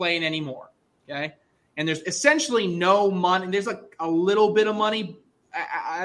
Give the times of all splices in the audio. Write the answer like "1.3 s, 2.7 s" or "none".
none